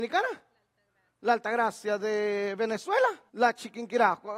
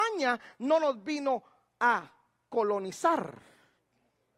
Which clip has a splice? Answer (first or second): first